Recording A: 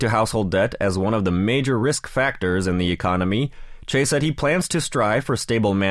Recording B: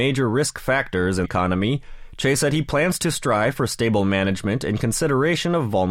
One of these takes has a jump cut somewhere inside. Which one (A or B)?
B